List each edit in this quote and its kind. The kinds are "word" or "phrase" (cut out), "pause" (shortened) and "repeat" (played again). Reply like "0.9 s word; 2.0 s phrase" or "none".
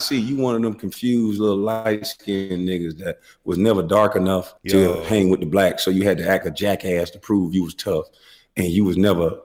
4.6 s pause; 6.4 s word